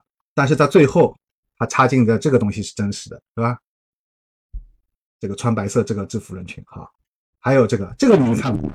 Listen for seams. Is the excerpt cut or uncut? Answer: uncut